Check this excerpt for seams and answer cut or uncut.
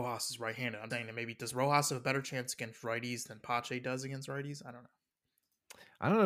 cut